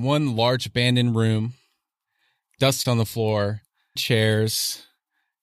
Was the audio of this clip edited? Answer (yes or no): yes